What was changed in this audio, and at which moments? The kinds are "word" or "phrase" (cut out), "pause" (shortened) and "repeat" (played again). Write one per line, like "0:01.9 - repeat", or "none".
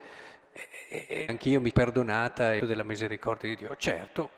0:01.3 - phrase
0:01.7 - word
0:02.6 - word